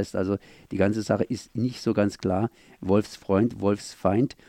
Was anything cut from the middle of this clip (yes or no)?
no